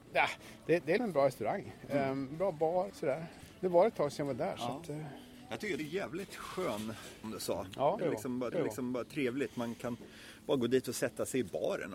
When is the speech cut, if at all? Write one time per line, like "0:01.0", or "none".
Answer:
0:01.0
0:02.9
0:05.8
0:07.2
0:08.0
0:08.5